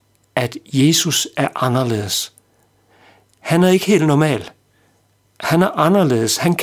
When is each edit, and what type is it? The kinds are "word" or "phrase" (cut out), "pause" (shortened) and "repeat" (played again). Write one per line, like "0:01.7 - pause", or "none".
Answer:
none